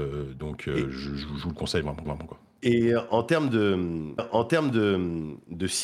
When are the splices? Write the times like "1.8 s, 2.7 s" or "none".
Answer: 2.0 s, 4.2 s